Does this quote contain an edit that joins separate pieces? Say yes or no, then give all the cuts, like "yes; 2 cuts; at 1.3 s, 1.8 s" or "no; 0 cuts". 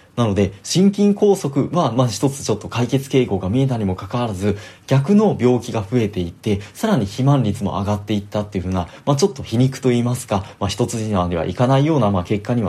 no; 0 cuts